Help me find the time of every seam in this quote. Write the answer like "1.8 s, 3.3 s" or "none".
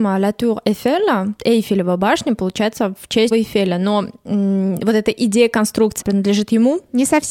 3.3 s, 6.0 s